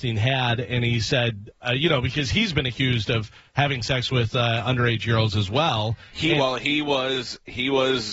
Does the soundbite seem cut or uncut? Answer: uncut